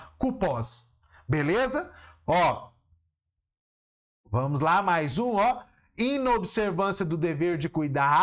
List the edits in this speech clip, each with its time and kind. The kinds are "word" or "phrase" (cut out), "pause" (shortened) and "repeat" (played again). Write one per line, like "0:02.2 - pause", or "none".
none

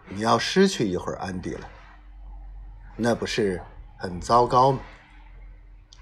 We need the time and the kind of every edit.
none

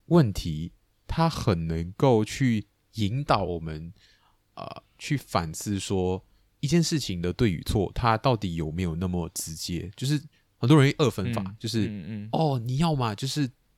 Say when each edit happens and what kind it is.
0:02.8 - pause

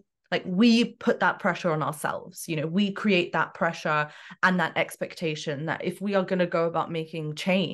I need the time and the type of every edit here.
none

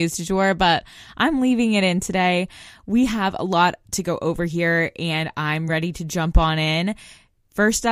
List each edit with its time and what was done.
none

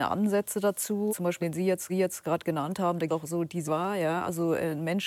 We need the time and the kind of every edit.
0:01.1 - word
0:01.4 - word
0:01.9 - repeat
0:03.1 - phrase
0:03.7 - phrase

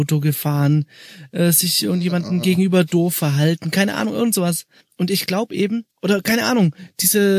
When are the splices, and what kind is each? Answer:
0:04.8 - pause
0:05.9 - pause

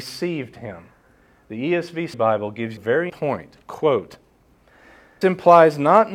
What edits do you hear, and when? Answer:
0:02.1 - word
0:02.8 - phrase
0:03.1 - word
0:05.2 - word

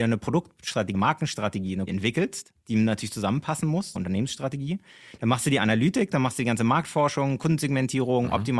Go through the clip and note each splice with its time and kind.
0:00.9 - word
0:01.9 - word
0:03.9 - word

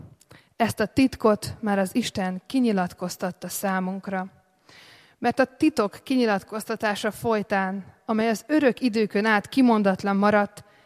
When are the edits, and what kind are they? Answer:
none

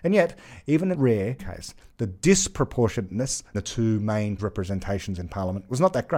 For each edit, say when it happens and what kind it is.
0:00.9 - word
0:01.4 - word
0:03.5 - word
0:04.4 - word

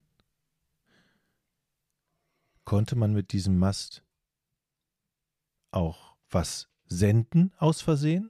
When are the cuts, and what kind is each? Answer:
0:06.2 - pause

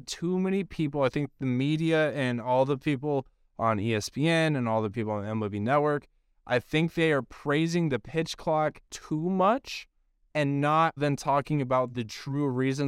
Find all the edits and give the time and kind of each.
0:08.9 - pause
0:11.0 - word

